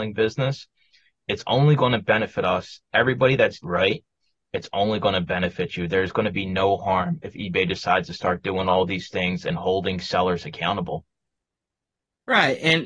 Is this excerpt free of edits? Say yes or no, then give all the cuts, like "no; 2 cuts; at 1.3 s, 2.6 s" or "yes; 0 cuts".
no; 1 cut; at 3.6 s